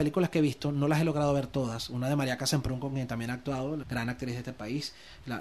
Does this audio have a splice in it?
yes; 1 cut; at 3.8 s

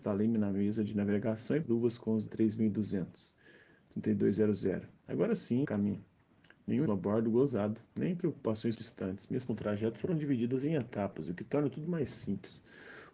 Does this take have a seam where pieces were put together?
yes; 8 cuts; at 1.6 s, 2.3 s, 5.0 s, 5.6 s, 6.9 s, 7.9 s, 8.7 s, 9.5 s

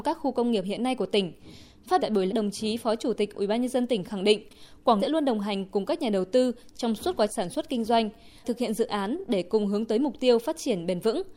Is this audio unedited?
no; 5 cuts; at 2.0 s, 2.3 s, 5.0 s, 7.3 s, 8.4 s

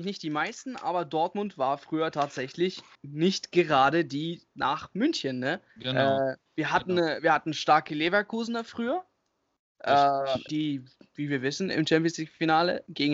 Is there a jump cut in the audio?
yes; 5 cuts; at 2.9 s, 4.5 s, 5.7 s, 6.5 s, 10.5 s

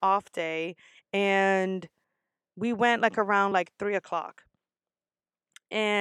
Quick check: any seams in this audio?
no; 0 cuts

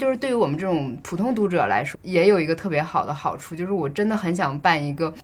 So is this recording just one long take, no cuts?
no; 1 cut; at 1.9 s

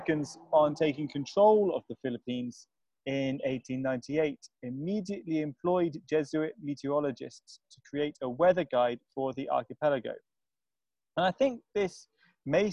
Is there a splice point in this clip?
no; 0 cuts

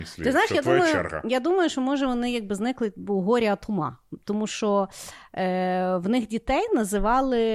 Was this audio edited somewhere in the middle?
no; 0 cuts

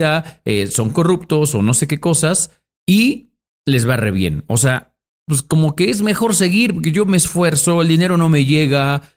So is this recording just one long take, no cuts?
yes; 0 cuts

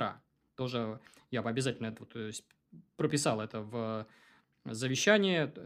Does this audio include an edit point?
no; 0 cuts

